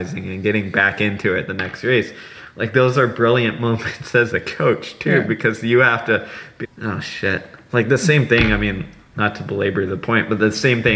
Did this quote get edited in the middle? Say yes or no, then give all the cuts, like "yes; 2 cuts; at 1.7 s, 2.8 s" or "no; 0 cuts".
yes; 1 cut; at 6.6 s